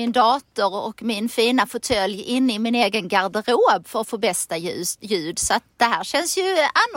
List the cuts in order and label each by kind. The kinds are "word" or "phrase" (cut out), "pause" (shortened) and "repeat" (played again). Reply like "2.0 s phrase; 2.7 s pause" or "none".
none